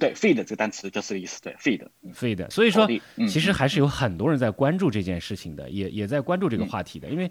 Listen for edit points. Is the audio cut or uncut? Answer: cut